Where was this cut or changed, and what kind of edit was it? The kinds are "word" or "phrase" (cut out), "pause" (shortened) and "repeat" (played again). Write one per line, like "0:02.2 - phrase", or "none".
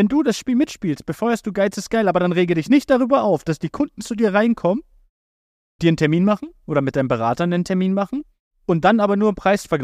0:05.8 - word